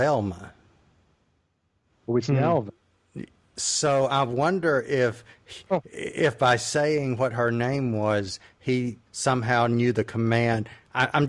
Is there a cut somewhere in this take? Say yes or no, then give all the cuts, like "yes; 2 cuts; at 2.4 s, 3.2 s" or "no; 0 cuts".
yes; 1 cut; at 9.1 s